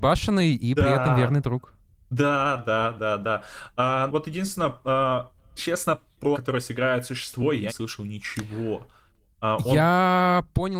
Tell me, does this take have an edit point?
yes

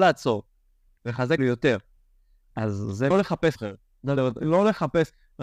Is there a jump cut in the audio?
yes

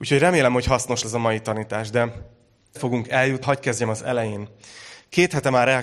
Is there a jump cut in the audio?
yes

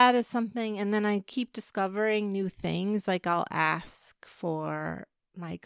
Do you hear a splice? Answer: no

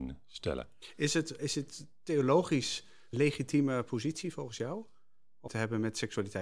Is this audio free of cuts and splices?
no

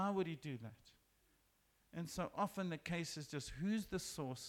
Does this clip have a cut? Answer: no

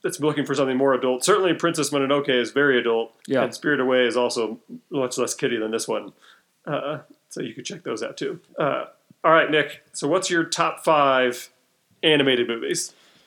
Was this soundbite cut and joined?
yes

